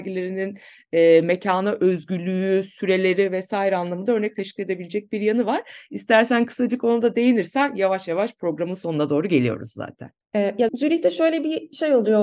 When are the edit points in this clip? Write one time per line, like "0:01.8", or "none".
0:10.7